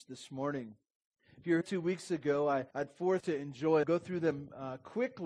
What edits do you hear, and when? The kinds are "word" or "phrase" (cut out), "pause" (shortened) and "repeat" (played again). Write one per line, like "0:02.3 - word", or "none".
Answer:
0:01.2 - pause
0:01.6 - word
0:02.7 - pause
0:03.2 - word
0:03.8 - phrase